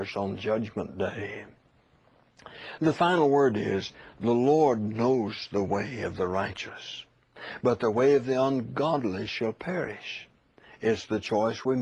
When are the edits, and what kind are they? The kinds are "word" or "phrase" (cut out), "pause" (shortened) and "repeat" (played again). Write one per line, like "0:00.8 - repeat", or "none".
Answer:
none